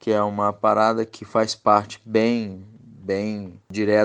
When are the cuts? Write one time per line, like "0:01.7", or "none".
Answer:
none